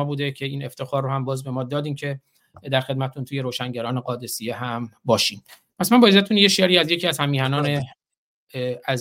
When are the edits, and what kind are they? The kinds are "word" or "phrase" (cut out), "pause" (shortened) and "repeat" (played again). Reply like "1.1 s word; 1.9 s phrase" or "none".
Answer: none